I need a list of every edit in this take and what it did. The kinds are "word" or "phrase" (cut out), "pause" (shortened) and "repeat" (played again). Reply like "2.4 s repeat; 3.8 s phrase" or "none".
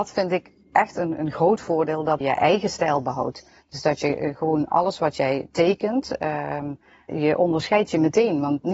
2.2 s word; 7.1 s word